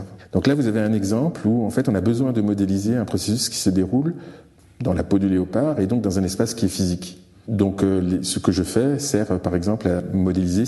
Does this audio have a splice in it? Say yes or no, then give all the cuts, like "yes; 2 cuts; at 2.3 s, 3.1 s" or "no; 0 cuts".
no; 0 cuts